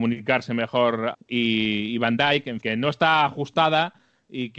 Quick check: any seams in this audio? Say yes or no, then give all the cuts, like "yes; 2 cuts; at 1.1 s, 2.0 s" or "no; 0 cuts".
yes; 2 cuts; at 1.1 s, 2.6 s